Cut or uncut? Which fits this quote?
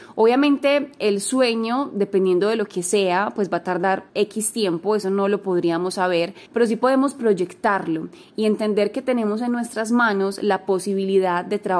cut